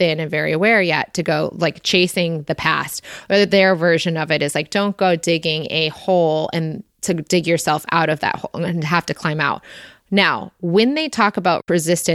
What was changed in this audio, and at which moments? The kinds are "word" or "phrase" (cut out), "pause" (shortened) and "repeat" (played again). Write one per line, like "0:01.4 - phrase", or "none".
none